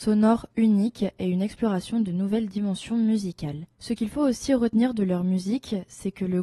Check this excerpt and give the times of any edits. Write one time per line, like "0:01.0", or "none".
0:03.7